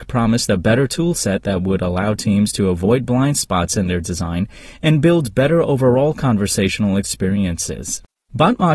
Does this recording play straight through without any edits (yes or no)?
yes